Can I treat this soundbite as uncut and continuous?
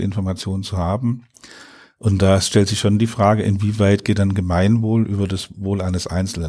yes; 0 cuts

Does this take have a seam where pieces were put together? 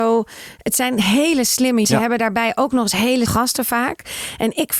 yes; 2 cuts; at 1.8 s, 3.3 s

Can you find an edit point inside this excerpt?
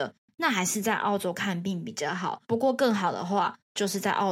yes; 1 cut; at 2.4 s

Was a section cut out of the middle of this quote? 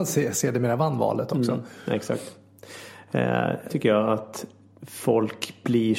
yes; 1 cut; at 3.7 s

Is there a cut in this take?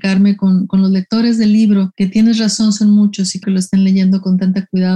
yes; 1 cut; at 3.4 s

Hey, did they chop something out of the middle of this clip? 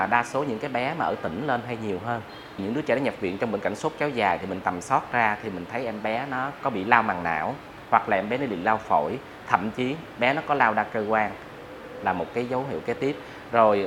yes; 1 cut; at 2.6 s

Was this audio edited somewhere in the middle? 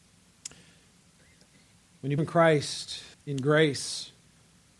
yes; 2 cuts; at 2.2 s, 3.1 s

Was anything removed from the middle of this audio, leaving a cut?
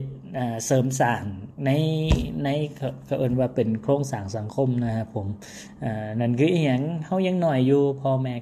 yes; 1 cut; at 1.6 s

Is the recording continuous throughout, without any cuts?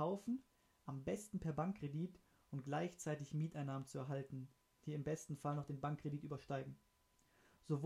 yes; 0 cuts

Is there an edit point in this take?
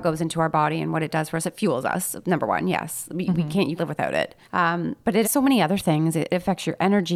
yes; 3 cuts; at 3.8 s, 4.4 s, 5.2 s

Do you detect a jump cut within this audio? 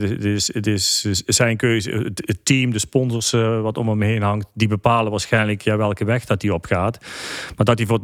no; 0 cuts

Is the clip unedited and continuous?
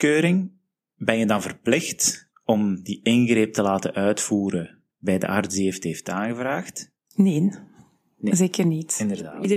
yes; 0 cuts

